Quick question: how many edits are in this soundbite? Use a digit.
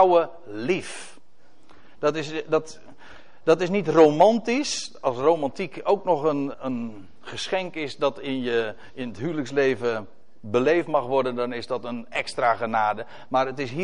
1